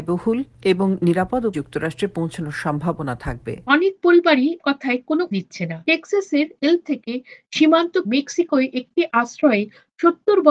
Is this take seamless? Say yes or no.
no